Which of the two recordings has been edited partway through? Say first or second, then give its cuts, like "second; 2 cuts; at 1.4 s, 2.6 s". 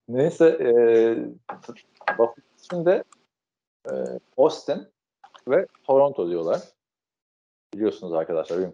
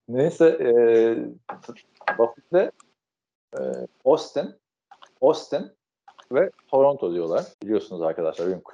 second; 3 cuts; at 2.5 s, 5.1 s, 7.5 s